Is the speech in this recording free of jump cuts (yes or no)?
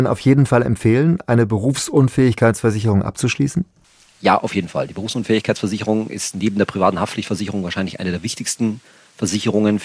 yes